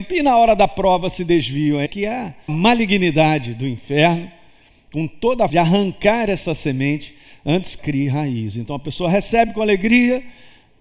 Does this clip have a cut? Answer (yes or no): yes